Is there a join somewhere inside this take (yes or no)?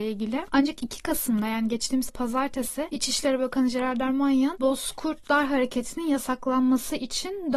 yes